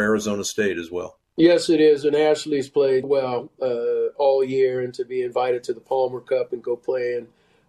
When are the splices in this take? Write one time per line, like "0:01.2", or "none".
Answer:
0:01.3
0:03.0